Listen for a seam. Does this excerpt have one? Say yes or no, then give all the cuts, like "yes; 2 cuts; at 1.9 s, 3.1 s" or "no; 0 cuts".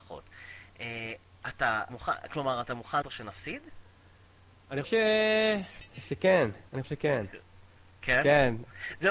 yes; 4 cuts; at 1.9 s, 3.0 s, 4.8 s, 6.8 s